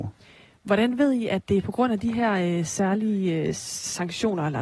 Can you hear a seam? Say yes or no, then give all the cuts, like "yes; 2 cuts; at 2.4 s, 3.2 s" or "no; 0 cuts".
no; 0 cuts